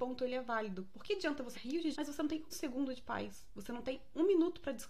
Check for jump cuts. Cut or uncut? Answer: cut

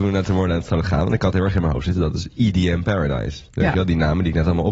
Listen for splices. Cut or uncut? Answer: uncut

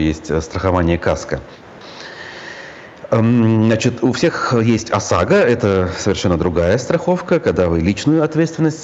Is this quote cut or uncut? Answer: uncut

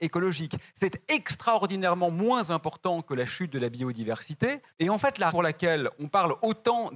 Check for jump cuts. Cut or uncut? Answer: cut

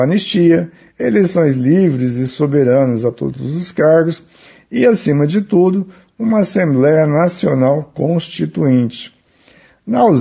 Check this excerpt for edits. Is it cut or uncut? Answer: uncut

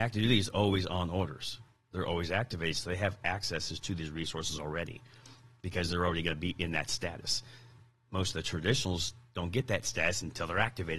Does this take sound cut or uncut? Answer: uncut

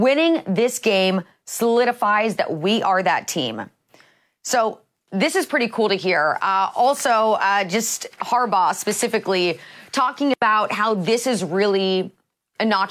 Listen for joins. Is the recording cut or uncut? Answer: uncut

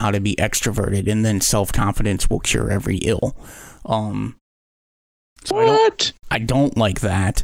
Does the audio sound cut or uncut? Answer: uncut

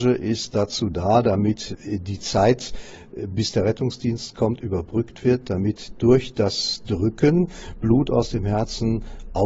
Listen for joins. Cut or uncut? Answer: uncut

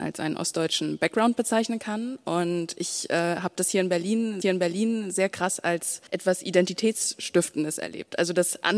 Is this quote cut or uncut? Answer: cut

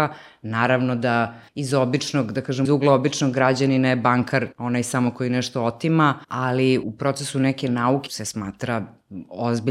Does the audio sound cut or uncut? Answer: cut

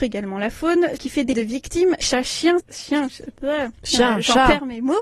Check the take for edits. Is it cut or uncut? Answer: cut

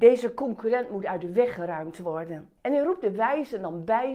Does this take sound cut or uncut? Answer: cut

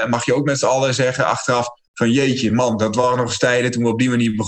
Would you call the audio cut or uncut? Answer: uncut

